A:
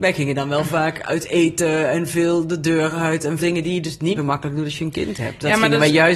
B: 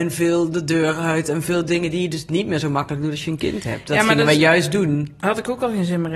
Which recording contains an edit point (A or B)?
A